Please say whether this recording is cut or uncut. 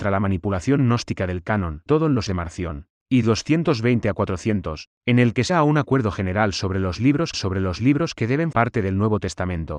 cut